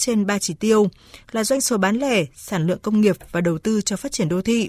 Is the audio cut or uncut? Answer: uncut